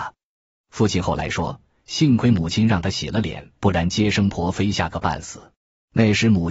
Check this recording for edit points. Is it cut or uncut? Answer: cut